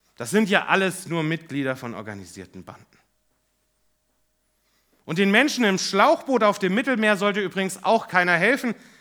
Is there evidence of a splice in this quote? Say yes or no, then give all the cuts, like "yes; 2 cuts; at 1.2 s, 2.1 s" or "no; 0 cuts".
no; 0 cuts